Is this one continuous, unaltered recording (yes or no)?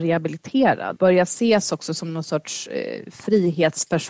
no